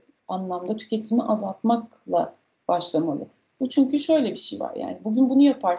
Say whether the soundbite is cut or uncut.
uncut